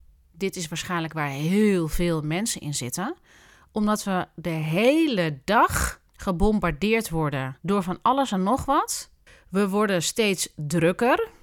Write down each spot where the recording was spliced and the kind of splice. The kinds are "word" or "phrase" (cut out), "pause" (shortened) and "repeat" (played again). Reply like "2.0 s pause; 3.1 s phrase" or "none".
6.1 s pause; 7.6 s pause; 9.3 s pause